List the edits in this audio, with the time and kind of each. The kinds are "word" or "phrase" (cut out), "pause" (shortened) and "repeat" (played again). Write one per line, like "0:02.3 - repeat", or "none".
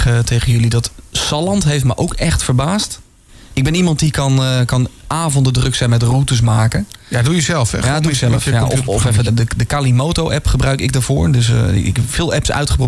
0:09.3 - phrase

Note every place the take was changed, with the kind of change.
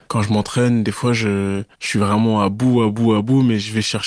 0:01.7 - pause

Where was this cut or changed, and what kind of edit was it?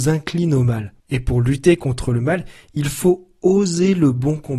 0:01.0 - pause

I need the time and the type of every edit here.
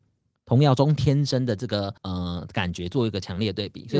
0:02.0 - pause

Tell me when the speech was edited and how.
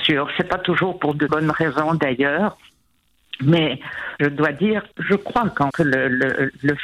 0:01.3 - word
0:04.2 - word
0:04.9 - word
0:05.7 - word

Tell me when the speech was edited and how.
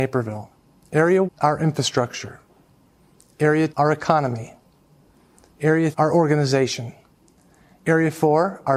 0:01.3 - word
0:03.7 - word
0:05.9 - word

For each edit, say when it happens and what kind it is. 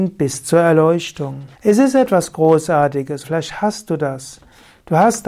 0:01.5 - pause
0:03.2 - word

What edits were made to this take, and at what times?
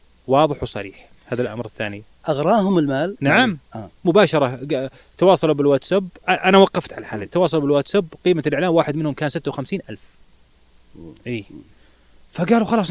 0:01.2 - pause

